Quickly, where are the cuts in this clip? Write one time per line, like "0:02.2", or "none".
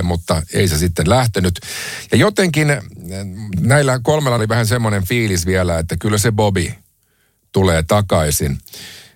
0:04.4

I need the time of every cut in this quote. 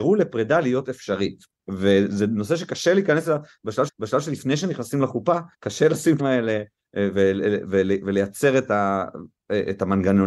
0:03.9
0:05.5
0:06.2

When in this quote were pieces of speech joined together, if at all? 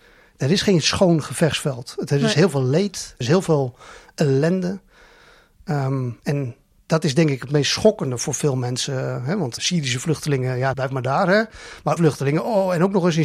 0:03.2
0:09.6
0:10.7
0:12.0

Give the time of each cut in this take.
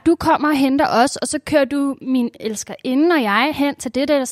none

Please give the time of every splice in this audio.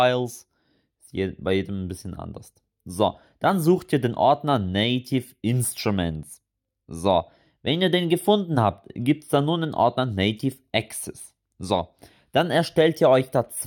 none

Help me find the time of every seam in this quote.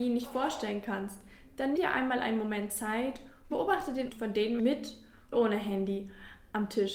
0:01.8
0:03.5
0:04.1
0:04.6
0:05.3

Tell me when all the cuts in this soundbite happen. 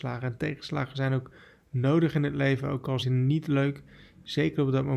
0:03.0

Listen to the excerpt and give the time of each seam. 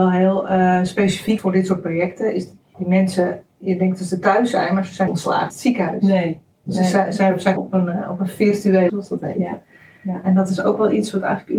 0:01.4
0:05.1
0:05.5
0:07.6
0:08.9

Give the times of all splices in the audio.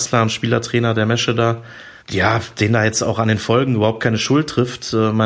0:02.0

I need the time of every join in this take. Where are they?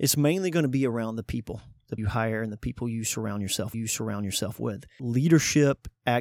0:02.0
0:03.7

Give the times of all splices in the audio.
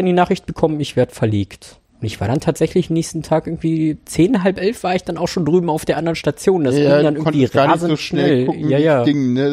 0:01.9

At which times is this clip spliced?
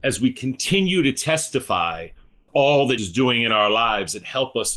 0:02.5
0:03.0

